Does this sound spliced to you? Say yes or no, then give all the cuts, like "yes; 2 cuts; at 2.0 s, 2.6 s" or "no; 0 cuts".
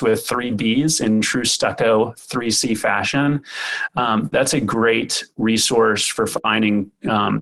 no; 0 cuts